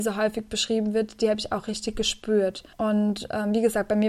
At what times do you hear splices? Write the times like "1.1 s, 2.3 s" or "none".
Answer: 2.7 s